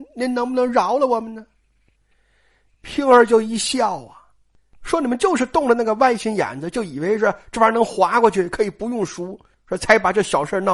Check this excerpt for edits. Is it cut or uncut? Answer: uncut